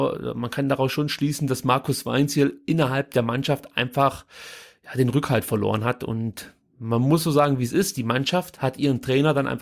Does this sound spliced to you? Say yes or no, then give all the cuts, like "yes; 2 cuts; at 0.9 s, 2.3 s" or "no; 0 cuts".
no; 0 cuts